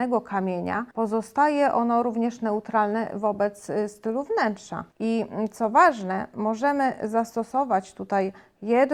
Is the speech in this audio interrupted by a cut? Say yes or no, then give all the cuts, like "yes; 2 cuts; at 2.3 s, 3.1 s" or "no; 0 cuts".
yes; 2 cuts; at 0.9 s, 4.9 s